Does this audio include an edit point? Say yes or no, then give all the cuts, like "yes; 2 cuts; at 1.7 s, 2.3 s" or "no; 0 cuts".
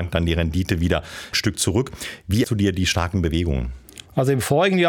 yes; 2 cuts; at 1.3 s, 2.4 s